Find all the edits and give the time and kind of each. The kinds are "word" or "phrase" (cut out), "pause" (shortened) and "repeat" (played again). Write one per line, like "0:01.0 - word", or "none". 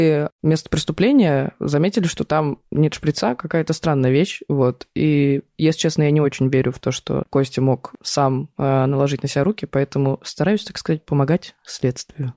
none